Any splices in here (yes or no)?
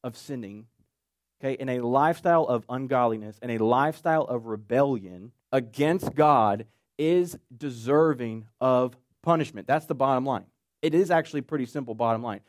yes